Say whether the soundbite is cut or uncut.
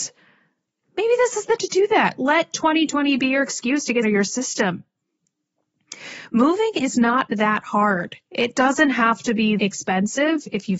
cut